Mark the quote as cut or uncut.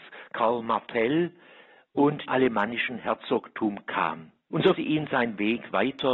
cut